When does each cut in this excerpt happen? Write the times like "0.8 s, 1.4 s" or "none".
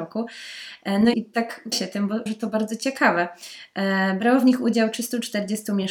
1.1 s, 1.7 s, 2.3 s